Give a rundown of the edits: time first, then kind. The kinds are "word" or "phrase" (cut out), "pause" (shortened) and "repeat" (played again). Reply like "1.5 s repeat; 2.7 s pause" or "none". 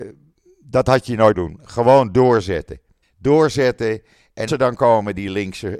1.3 s word; 3.0 s pause; 4.5 s word